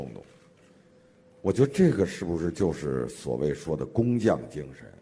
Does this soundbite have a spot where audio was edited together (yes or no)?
no